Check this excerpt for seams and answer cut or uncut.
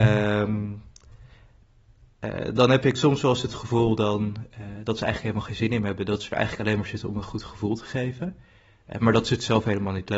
uncut